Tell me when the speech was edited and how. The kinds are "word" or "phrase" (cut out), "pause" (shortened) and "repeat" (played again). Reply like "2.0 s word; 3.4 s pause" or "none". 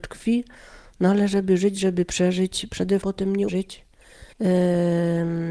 3.0 s word; 3.5 s word; 4.3 s pause